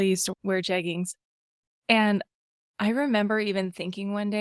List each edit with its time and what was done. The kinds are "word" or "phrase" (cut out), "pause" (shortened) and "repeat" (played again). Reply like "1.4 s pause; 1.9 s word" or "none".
none